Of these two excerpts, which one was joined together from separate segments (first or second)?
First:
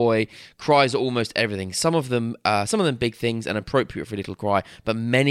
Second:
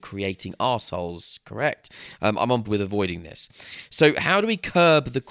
second